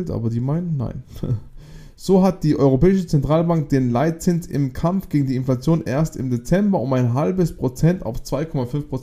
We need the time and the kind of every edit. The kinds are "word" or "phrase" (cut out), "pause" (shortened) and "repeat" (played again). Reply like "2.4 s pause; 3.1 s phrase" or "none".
none